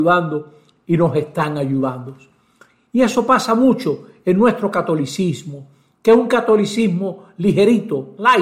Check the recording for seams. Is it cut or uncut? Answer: uncut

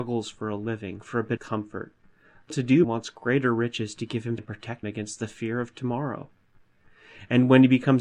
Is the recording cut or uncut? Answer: cut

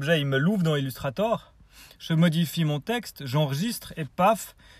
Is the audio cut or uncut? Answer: uncut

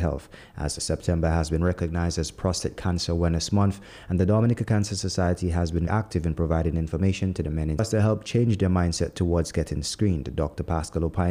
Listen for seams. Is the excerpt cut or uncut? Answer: cut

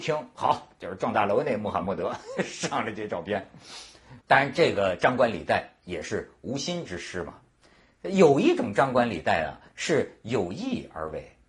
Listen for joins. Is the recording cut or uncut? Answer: cut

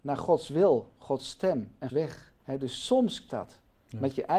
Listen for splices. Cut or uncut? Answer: cut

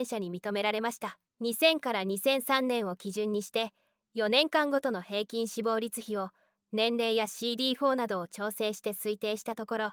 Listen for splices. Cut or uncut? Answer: cut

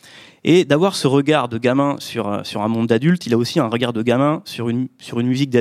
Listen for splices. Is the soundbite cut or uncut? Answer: uncut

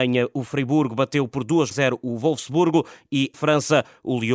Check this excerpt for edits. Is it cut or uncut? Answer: cut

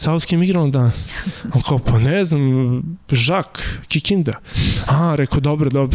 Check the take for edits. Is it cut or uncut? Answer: uncut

